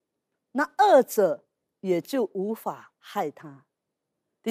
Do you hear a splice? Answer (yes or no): no